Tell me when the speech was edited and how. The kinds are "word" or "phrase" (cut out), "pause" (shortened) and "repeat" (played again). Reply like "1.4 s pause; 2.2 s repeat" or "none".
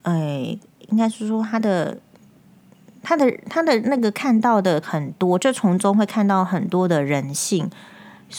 4.8 s word